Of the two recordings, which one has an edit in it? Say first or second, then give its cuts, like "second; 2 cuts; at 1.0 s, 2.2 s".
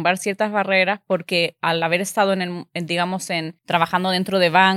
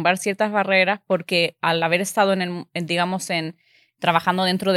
first; 1 cut; at 3.6 s